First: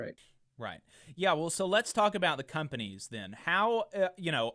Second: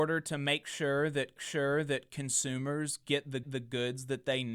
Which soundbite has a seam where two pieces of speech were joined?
second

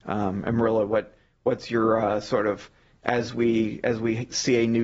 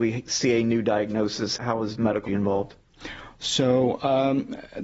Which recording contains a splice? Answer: second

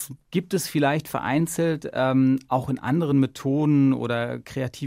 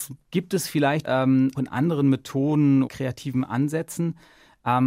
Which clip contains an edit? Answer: second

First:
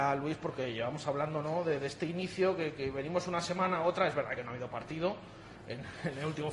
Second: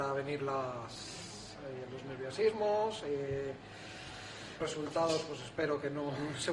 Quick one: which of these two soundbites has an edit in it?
second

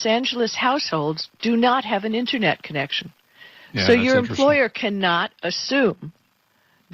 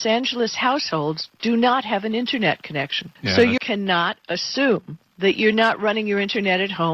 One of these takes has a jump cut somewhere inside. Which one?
second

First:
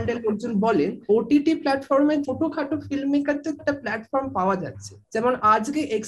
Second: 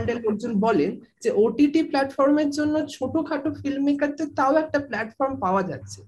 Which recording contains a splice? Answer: first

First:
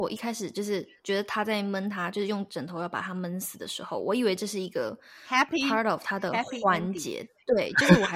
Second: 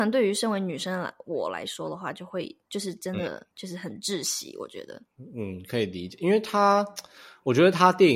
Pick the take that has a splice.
second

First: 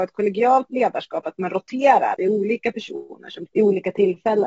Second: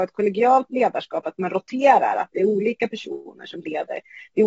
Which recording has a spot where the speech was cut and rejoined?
first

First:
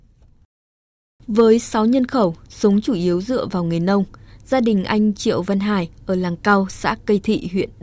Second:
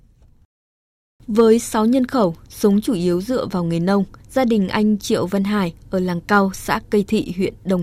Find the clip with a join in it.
second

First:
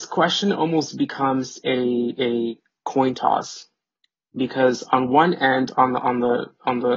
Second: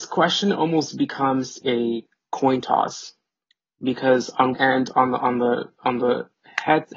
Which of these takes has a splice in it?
second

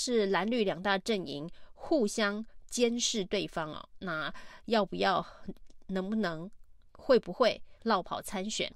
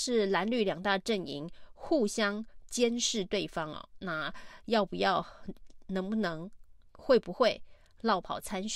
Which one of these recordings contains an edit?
first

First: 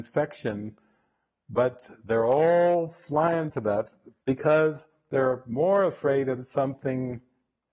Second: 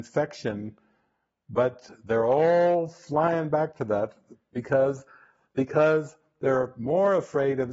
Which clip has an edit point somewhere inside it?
first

